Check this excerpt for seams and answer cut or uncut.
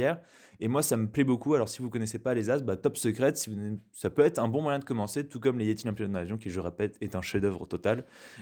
uncut